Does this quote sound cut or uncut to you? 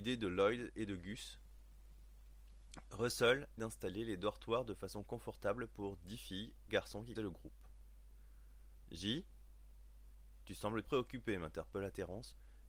cut